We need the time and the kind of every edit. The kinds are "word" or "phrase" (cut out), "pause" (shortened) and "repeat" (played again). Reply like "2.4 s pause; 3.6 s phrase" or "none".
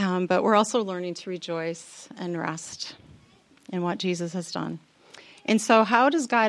none